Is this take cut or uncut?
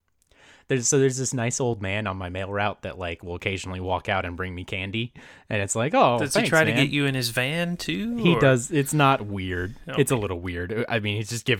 uncut